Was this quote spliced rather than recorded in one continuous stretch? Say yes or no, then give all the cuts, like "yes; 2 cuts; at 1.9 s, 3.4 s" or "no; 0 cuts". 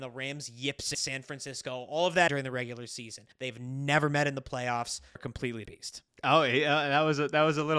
yes; 5 cuts; at 0.9 s, 2.3 s, 3.3 s, 5.2 s, 5.7 s